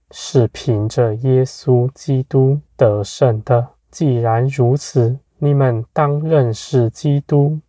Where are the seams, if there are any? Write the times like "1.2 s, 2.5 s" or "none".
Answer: 2.7 s, 3.8 s, 5.3 s